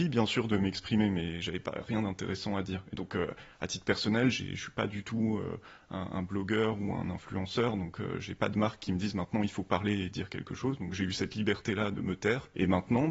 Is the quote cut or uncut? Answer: uncut